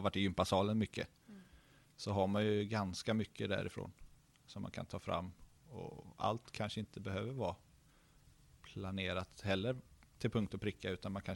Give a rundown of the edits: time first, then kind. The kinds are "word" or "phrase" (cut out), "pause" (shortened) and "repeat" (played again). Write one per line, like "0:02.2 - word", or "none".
none